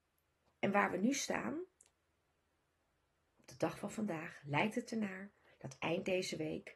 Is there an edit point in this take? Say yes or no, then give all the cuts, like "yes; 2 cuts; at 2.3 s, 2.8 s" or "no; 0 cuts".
no; 0 cuts